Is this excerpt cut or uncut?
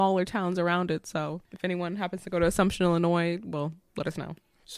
cut